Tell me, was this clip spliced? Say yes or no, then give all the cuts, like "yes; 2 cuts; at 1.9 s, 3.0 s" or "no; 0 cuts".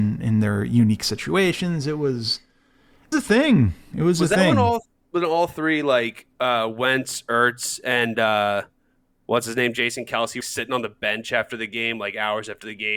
yes; 2 cuts; at 3.1 s, 10.4 s